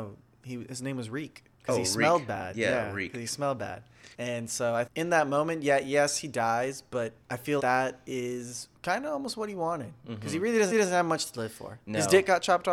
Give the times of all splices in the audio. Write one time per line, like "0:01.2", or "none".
0:01.5
0:04.1
0:04.9
0:07.2
0:07.6
0:08.8
0:10.7